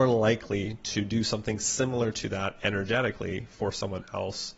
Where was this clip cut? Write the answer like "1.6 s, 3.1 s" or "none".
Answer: none